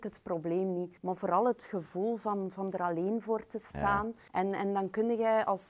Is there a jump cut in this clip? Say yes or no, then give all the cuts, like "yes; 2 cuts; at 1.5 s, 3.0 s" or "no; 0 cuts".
yes; 2 cuts; at 1.0 s, 4.3 s